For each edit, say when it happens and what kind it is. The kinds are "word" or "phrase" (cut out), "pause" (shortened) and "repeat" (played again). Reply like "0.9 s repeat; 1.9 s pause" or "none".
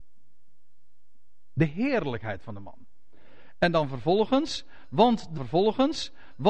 5.4 s repeat